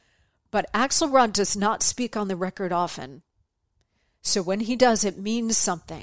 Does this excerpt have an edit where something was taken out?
no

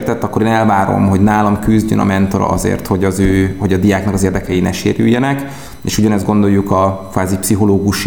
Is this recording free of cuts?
yes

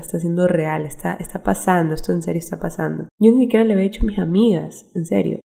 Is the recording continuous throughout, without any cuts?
no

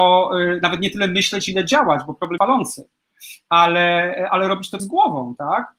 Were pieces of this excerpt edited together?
yes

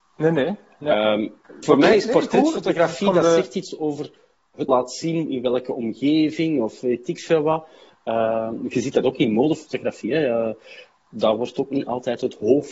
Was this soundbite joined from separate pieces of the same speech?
yes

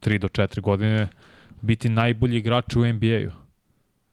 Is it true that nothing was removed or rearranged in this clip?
yes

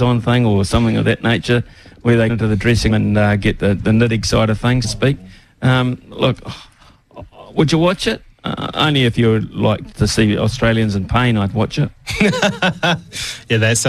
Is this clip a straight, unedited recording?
no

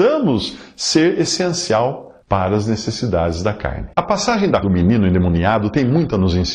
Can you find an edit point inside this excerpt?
yes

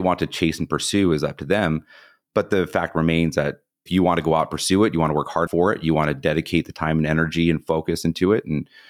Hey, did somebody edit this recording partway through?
yes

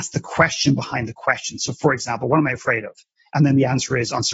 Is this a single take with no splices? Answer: yes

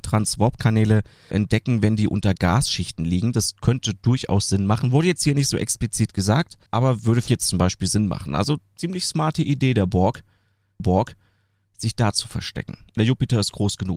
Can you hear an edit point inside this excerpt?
yes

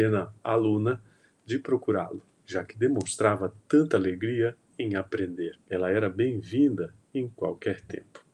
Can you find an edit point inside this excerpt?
yes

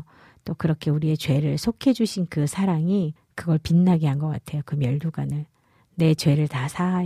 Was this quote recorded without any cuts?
no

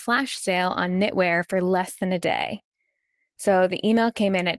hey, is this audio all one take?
yes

